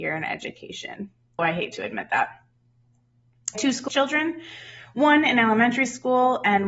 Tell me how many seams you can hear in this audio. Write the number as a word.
three